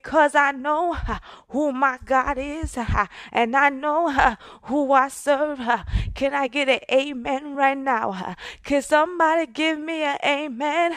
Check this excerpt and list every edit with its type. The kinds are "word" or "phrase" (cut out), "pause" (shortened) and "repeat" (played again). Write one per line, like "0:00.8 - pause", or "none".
none